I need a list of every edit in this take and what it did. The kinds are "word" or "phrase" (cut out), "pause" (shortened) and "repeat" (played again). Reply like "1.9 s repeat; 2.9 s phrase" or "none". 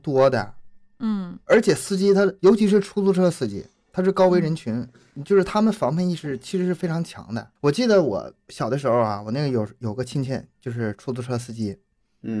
7.6 s pause

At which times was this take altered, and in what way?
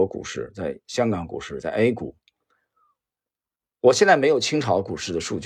none

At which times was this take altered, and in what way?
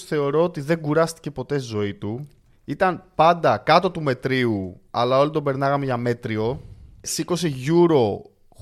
none

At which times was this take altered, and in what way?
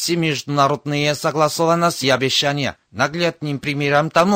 2.0 s word; 2.8 s pause

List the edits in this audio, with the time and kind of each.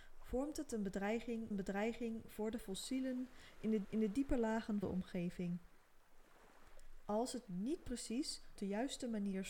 1.5 s repeat; 2.6 s word; 3.8 s repeat; 4.8 s word; 7.5 s word; 8.6 s word

